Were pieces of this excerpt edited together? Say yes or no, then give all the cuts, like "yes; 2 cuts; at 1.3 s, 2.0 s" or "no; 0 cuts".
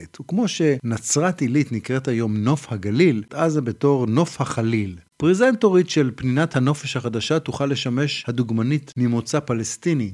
yes; 1 cut; at 3.3 s